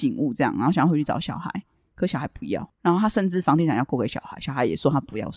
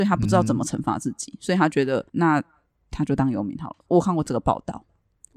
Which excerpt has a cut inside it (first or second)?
second